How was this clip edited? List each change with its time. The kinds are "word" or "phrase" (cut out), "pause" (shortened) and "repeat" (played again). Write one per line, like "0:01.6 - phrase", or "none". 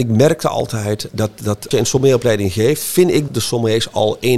0:01.1 - word
0:01.7 - word
0:03.3 - word